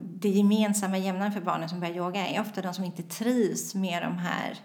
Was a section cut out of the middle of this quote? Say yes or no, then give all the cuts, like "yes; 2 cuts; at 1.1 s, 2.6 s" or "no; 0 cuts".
no; 0 cuts